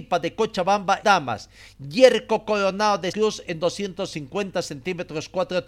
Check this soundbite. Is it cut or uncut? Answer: cut